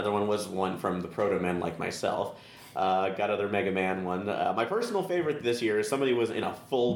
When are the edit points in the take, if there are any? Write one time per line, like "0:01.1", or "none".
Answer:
none